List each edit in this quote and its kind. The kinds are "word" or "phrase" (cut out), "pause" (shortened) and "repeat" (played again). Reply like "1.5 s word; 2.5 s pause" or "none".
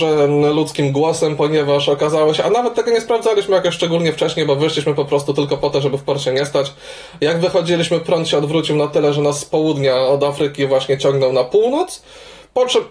none